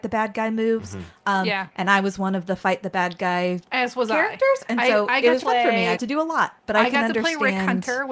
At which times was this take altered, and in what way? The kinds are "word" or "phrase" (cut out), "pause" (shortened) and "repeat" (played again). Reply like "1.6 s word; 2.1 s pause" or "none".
5.4 s word; 6.0 s word